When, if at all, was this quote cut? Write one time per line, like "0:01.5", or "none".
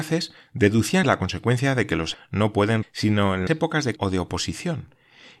0:01.0
0:02.1
0:02.8
0:03.5
0:04.0